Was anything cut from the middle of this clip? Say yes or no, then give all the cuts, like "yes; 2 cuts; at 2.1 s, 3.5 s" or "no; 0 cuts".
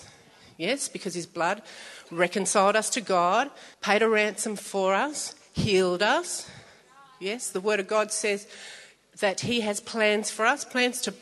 yes; 1 cut; at 3.7 s